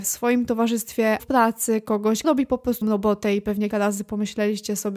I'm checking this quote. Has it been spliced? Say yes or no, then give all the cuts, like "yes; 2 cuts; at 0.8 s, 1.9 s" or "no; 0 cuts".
yes; 4 cuts; at 1.2 s, 2.2 s, 2.8 s, 3.7 s